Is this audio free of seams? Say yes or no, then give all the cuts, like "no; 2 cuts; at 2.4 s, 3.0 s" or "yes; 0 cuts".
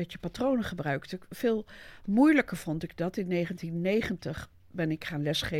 yes; 0 cuts